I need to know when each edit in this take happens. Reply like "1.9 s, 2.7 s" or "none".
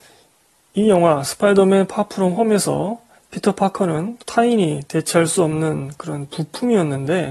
3.2 s, 4.2 s